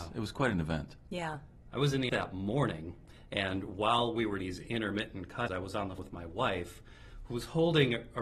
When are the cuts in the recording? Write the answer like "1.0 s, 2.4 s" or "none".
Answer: 2.1 s, 4.4 s, 5.5 s, 6.0 s

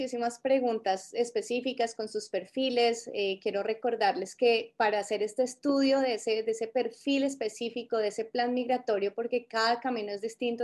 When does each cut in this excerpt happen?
none

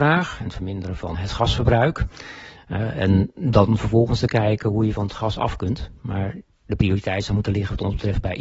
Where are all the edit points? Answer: 1.1 s

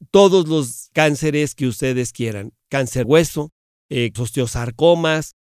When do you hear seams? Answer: 0.9 s, 3.0 s, 4.2 s

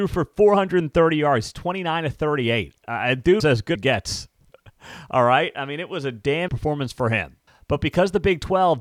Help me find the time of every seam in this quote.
3.4 s, 3.8 s, 6.5 s, 7.5 s

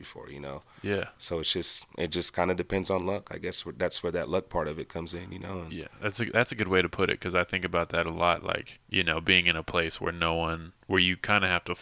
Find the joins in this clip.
8.8 s, 10.8 s

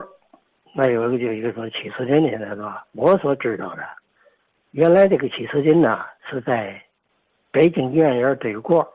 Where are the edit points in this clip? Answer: 2.9 s, 6.2 s

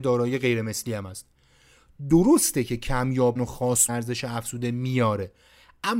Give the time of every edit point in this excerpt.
3.4 s, 3.9 s

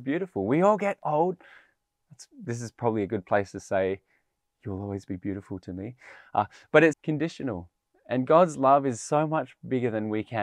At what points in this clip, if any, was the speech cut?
6.9 s

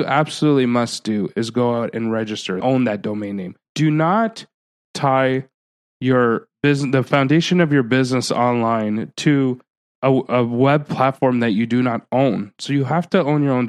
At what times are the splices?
2.6 s, 3.6 s

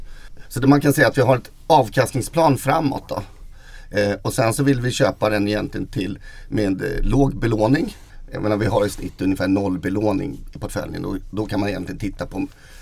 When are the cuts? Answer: none

